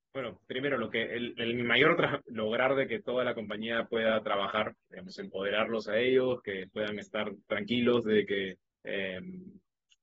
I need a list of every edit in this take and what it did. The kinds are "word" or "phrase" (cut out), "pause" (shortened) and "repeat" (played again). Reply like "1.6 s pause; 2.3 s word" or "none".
2.2 s phrase; 4.9 s word; 8.7 s pause